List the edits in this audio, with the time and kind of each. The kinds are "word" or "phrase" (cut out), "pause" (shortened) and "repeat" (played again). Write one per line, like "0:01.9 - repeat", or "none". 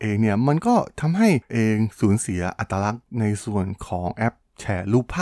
0:01.5 - word